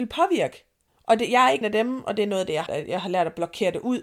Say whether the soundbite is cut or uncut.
cut